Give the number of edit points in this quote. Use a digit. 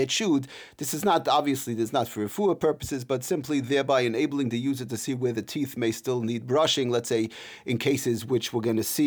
0